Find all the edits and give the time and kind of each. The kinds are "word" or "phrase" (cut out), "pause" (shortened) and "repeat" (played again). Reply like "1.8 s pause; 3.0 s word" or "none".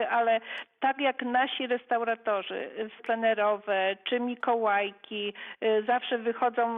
3.0 s phrase